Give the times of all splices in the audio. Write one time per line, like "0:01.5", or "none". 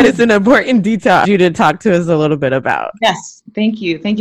0:01.2